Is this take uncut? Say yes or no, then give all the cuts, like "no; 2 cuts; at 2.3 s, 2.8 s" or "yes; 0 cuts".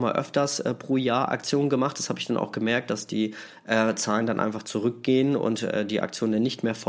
yes; 0 cuts